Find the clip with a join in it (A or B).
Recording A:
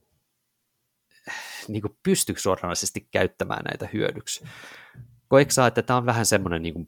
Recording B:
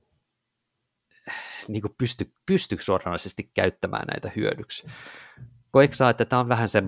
A